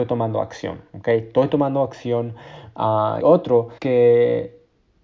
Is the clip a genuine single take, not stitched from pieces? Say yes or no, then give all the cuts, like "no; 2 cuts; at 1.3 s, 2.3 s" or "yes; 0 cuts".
no; 2 cuts; at 3.2 s, 3.8 s